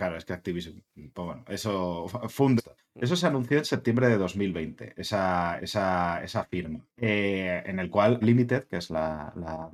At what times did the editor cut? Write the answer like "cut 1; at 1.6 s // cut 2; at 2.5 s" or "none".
cut 1; at 2.6 s // cut 2; at 5.6 s // cut 3; at 6.9 s // cut 4; at 8.2 s

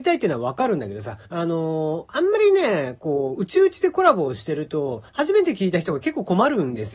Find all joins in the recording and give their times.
cut 1; at 1.2 s // cut 2; at 5.1 s

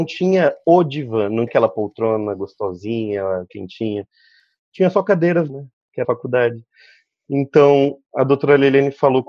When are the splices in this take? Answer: cut 1; at 1.5 s // cut 2; at 3.5 s // cut 3; at 5.5 s // cut 4; at 6.0 s

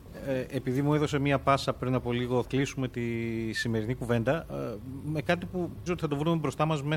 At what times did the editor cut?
cut 1; at 2.4 s // cut 2; at 5.9 s

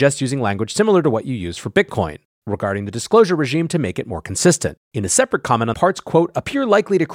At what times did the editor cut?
cut 1; at 4.8 s // cut 2; at 5.7 s

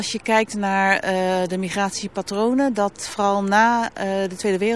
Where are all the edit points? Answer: none

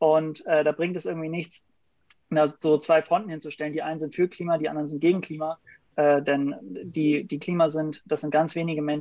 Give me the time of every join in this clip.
cut 1; at 7.4 s

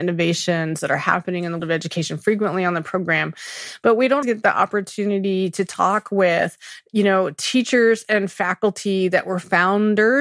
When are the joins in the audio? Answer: cut 1; at 1.6 s // cut 2; at 4.2 s

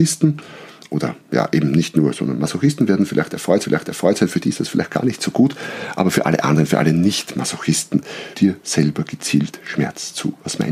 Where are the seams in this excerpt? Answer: cut 1; at 1.2 s // cut 2; at 3.6 s // cut 3; at 8.3 s

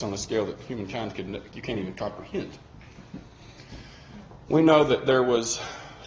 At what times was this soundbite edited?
none

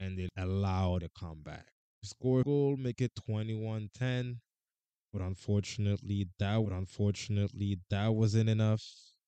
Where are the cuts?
cut 1; at 1.0 s // cut 2; at 2.4 s // cut 3; at 3.1 s // cut 4; at 6.6 s

